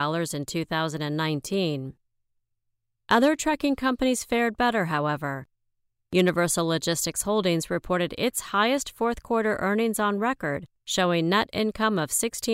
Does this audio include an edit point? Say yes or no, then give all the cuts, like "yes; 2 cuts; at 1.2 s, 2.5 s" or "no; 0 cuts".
no; 0 cuts